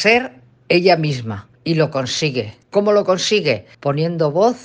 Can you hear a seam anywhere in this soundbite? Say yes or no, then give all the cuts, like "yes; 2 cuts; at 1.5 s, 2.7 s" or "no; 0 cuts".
yes; 3 cuts; at 1.6 s, 2.6 s, 3.7 s